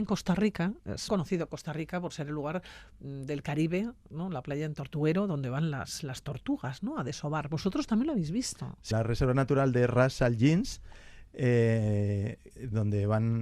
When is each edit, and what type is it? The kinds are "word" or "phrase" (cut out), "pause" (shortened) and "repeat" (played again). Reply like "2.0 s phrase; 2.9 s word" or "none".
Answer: 1.1 s word; 8.9 s phrase